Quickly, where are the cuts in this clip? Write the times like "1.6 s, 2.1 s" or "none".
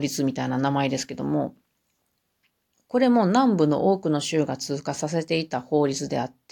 none

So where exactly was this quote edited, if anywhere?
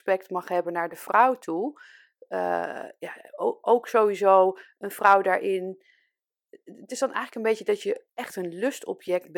none

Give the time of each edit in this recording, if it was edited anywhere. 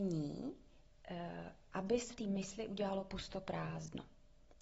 2.1 s

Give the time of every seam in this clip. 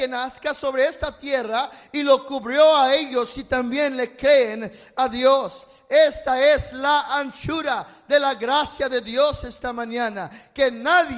none

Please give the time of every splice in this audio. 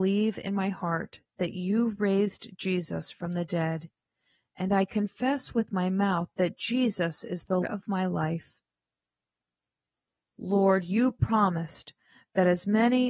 7.6 s

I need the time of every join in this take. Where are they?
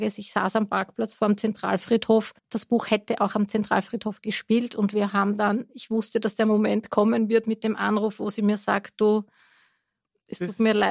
2.4 s

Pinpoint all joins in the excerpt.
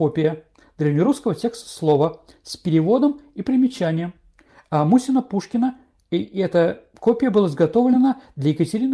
none

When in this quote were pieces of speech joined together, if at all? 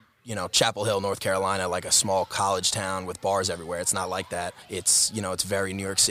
4.6 s

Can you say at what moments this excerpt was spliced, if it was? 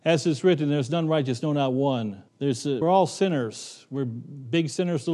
2.3 s, 2.8 s

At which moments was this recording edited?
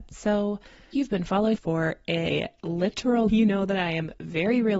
0.9 s, 1.5 s, 3.3 s

